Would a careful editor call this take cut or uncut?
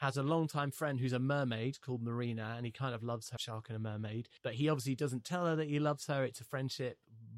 cut